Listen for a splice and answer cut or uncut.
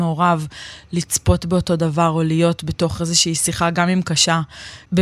uncut